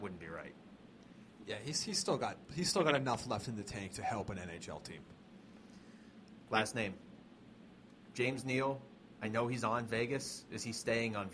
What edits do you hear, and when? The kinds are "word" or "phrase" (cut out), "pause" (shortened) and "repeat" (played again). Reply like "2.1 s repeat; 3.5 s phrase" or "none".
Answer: none